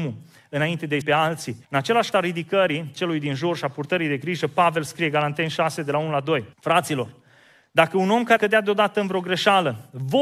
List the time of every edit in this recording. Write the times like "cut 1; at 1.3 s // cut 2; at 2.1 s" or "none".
cut 1; at 1.0 s // cut 2; at 1.6 s // cut 3; at 2.1 s // cut 4; at 6.5 s // cut 5; at 8.4 s